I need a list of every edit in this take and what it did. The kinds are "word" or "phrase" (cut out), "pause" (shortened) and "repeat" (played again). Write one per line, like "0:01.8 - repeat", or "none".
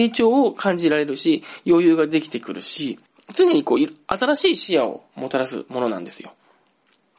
0:03.1 - pause